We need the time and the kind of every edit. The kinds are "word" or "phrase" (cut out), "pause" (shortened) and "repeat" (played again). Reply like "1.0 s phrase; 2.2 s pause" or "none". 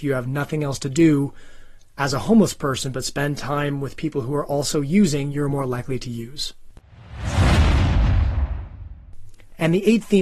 none